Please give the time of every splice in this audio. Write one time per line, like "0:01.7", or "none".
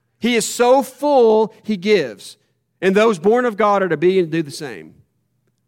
none

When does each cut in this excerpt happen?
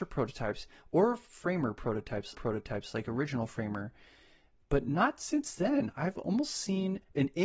0:02.3

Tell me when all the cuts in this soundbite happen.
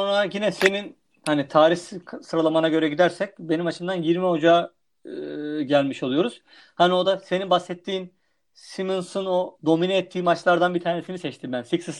none

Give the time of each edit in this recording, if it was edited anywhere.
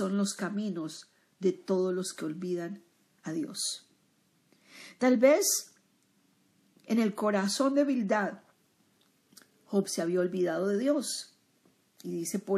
none

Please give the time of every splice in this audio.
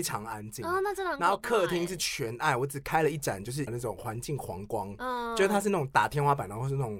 0:03.7

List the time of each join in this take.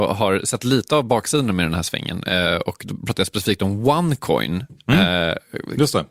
none

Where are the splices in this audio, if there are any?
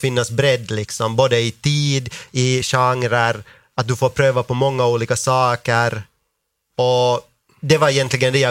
none

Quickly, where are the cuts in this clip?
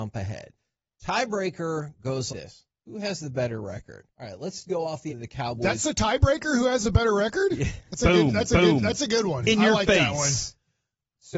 0:02.3
0:04.1
0:04.6
0:05.1
0:08.5

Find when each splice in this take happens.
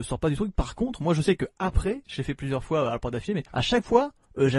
0:03.5

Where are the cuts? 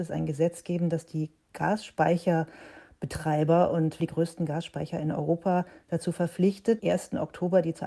0:04.0
0:06.8

